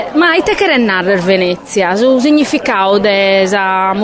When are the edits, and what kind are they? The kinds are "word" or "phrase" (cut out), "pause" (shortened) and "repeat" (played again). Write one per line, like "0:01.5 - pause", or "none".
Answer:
none